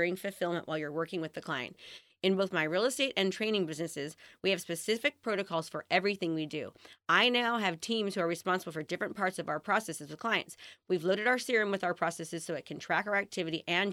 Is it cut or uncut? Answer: uncut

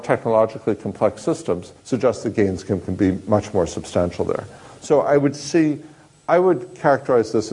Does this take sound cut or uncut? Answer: cut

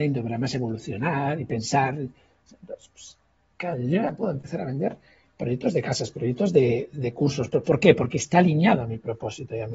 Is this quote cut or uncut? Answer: uncut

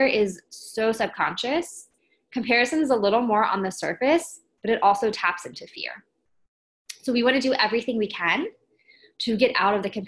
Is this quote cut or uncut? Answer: uncut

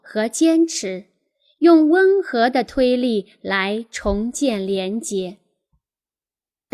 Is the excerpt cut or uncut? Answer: uncut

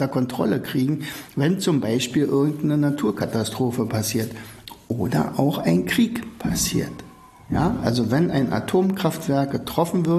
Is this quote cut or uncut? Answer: uncut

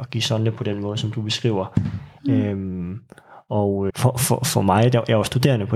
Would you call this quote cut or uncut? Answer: cut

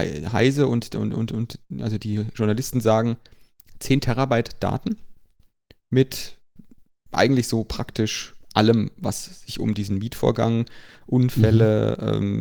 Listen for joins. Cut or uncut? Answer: uncut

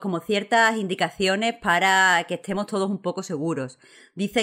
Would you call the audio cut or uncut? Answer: uncut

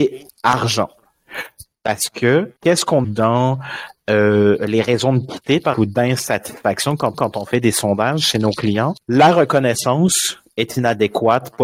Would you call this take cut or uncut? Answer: cut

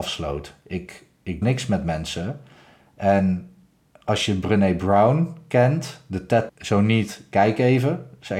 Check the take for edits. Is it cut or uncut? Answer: cut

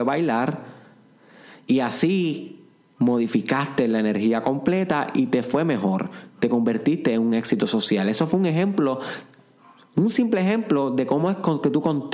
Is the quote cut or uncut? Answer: uncut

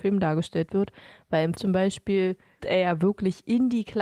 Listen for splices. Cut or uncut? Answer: cut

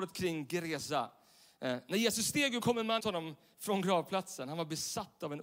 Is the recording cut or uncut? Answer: cut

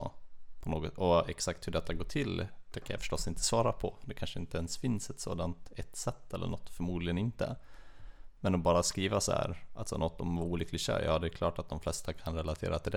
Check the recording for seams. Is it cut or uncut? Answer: uncut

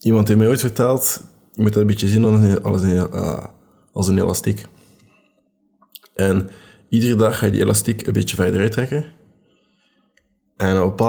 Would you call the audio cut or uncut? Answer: uncut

